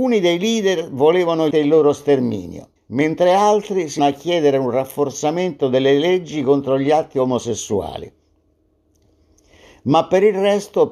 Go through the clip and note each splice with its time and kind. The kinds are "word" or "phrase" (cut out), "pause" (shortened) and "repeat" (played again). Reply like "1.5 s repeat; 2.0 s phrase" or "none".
1.5 s word; 2.8 s pause; 4.0 s word